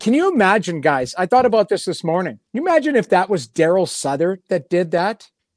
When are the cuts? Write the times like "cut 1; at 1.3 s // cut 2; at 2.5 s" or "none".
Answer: cut 1; at 2.5 s